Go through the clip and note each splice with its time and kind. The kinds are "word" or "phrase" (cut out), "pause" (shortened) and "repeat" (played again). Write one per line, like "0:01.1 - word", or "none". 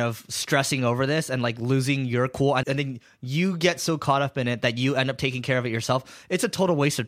0:02.6 - word